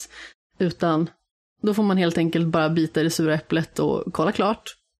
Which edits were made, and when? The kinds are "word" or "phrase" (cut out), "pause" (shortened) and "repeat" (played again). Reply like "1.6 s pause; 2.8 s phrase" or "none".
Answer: 1.3 s pause